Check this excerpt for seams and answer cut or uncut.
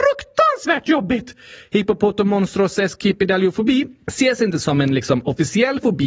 uncut